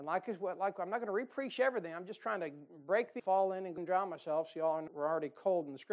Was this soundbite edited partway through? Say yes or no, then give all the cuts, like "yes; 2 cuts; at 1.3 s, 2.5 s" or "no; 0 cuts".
yes; 3 cuts; at 3.2 s, 3.8 s, 4.9 s